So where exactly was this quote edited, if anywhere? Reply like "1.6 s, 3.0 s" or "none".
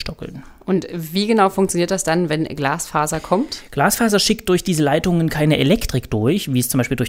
none